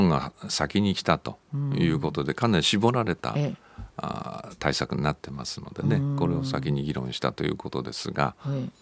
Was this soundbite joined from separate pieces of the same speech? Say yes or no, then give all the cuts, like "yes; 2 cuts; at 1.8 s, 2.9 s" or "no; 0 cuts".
no; 0 cuts